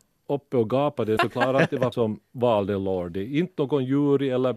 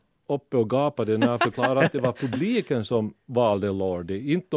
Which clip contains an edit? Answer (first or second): first